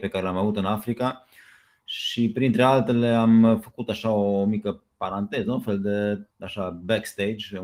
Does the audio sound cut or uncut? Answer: cut